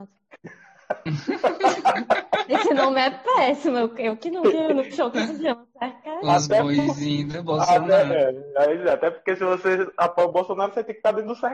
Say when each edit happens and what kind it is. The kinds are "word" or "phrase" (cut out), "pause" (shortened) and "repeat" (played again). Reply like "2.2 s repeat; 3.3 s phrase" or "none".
none